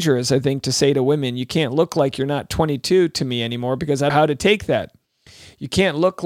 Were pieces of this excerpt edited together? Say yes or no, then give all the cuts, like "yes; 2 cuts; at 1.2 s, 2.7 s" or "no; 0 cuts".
yes; 1 cut; at 4.1 s